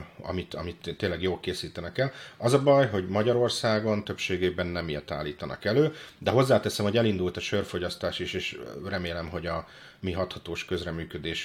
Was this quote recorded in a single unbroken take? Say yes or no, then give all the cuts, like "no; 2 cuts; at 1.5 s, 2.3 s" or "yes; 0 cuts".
yes; 0 cuts